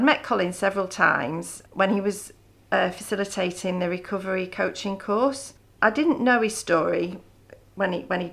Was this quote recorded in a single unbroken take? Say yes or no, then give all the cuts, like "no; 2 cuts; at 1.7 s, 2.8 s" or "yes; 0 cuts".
yes; 0 cuts